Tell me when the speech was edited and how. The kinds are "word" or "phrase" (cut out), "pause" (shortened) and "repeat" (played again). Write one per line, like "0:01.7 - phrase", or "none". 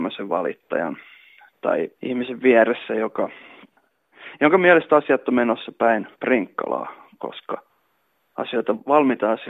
0:01.9 - pause
0:06.1 - pause